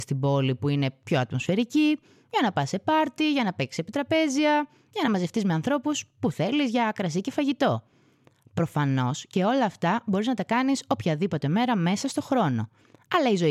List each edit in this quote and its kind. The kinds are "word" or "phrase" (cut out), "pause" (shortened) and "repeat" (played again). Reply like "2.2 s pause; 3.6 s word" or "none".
none